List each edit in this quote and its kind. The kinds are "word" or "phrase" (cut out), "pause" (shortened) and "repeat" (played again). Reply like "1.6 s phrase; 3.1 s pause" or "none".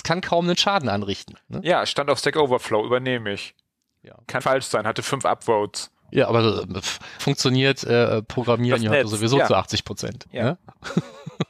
4.4 s word; 7.2 s word